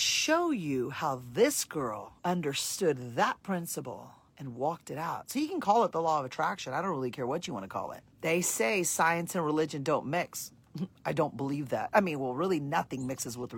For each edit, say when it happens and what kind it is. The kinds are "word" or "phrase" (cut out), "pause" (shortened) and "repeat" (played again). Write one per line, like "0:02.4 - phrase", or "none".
0:02.2 - pause
0:04.3 - pause
0:08.1 - pause